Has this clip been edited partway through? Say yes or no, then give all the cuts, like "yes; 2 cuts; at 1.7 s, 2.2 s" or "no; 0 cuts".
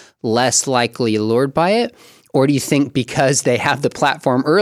no; 0 cuts